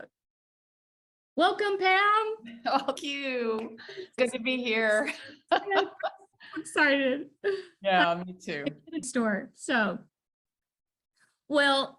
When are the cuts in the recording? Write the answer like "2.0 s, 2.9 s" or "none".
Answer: 3.0 s, 4.2 s, 9.0 s